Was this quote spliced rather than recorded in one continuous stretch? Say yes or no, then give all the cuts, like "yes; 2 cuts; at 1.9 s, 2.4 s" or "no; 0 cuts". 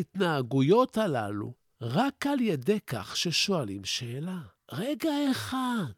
no; 0 cuts